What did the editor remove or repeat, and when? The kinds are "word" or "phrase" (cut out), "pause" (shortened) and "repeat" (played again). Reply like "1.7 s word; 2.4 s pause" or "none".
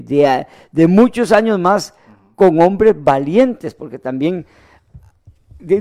none